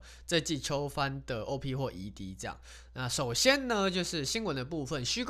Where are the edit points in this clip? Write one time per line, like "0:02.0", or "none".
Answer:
none